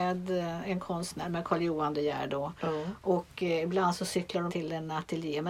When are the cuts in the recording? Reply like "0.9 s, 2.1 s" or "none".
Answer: 4.5 s